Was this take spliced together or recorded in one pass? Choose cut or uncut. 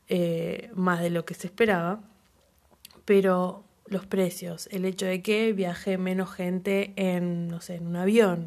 uncut